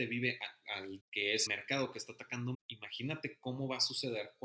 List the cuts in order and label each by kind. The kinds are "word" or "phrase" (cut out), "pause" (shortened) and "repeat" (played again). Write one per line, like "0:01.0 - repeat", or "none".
0:01.0 - word
0:01.5 - word
0:02.5 - word